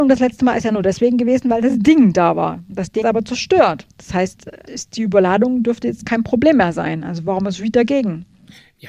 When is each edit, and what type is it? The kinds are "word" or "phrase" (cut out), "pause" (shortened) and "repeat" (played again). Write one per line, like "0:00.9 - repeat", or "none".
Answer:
0:03.0 - phrase
0:03.9 - pause
0:04.7 - word